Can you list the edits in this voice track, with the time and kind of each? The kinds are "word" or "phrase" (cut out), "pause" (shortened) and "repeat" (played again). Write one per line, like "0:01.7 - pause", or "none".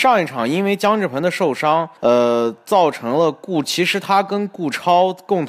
0:02.0 - pause